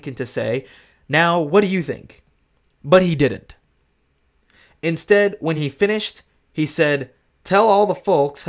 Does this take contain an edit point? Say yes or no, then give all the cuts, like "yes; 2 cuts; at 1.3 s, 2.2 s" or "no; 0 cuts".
no; 0 cuts